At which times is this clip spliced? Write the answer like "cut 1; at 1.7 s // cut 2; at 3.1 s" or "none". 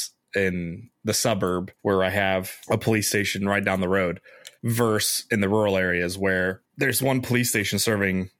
cut 1; at 1.8 s // cut 2; at 4.6 s

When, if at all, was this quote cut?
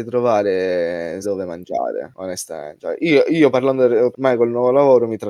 cut 1; at 1.2 s // cut 2; at 4.1 s

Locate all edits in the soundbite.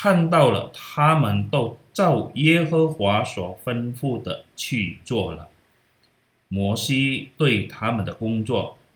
none

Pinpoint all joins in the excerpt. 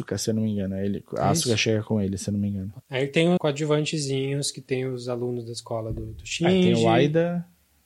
cut 1; at 3.4 s

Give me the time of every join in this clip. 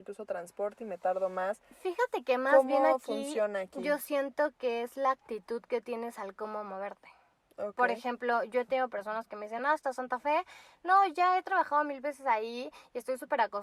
none

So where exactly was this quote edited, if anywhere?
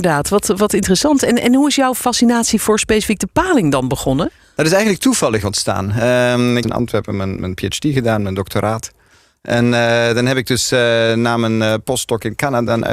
cut 1; at 6.6 s // cut 2; at 7.4 s

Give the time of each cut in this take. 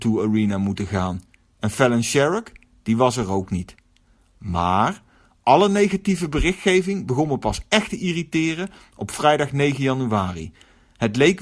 none

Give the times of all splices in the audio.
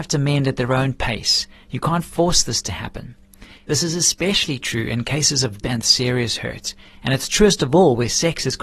cut 1; at 5.6 s

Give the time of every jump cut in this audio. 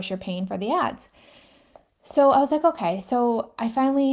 none

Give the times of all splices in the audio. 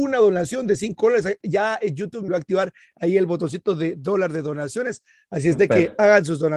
cut 1; at 2.3 s

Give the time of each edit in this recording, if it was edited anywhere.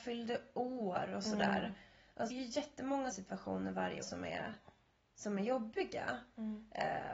cut 1; at 2.3 s // cut 2; at 3.1 s // cut 3; at 4.0 s

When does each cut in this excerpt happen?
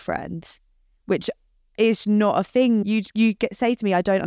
cut 1; at 2.0 s // cut 2; at 2.8 s

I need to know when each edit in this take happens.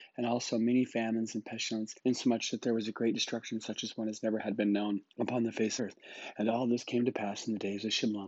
cut 1; at 2.0 s // cut 2; at 5.1 s // cut 3; at 5.8 s

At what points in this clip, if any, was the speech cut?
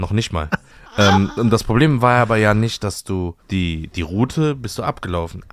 cut 1; at 3.4 s

